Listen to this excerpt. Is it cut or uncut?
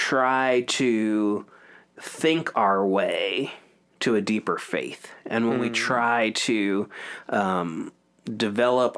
uncut